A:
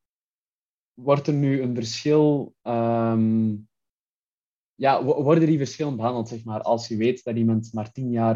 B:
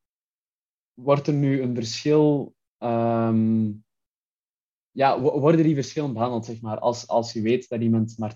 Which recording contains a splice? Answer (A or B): A